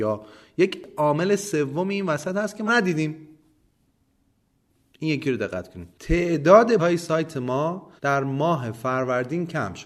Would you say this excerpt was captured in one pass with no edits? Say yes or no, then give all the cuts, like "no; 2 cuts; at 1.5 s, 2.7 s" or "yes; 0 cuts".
no; 3 cuts; at 2.7 s, 6.8 s, 8.0 s